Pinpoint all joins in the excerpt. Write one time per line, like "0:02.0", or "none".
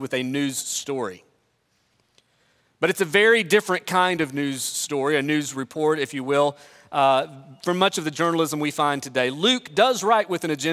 none